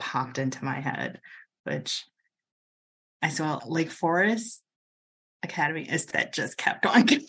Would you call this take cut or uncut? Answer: cut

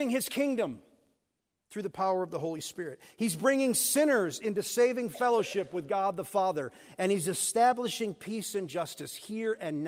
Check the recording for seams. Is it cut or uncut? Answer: uncut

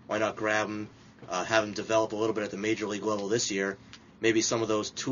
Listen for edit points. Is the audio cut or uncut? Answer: uncut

